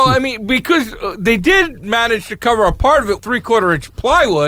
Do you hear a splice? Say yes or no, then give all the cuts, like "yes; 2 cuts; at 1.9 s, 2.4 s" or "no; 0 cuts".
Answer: yes; 1 cut; at 3.2 s